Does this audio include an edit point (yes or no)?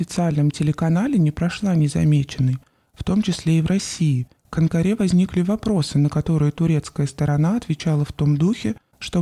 no